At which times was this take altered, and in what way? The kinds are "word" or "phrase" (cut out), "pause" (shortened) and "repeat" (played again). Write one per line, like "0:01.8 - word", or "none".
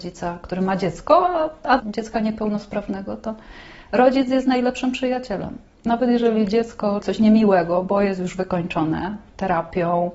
0:01.8 - phrase
0:07.0 - phrase

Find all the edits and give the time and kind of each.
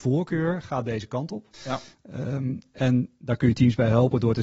0:01.5 - pause

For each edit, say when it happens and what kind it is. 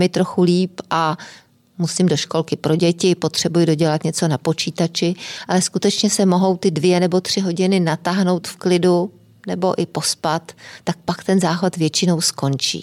none

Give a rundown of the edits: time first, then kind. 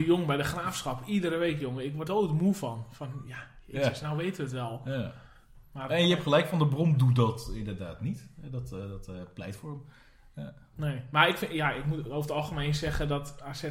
0:02.0 - word
0:05.9 - word

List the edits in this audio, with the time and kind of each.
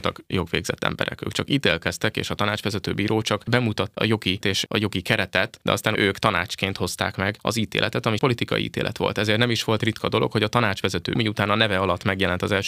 0:03.9 - word
0:04.4 - word
0:05.9 - word
0:08.2 - word
0:09.8 - word
0:11.2 - word

